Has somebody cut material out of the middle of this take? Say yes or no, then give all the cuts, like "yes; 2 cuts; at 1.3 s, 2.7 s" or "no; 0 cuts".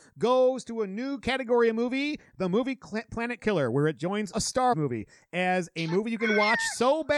yes; 3 cuts; at 3.4 s, 4.3 s, 4.7 s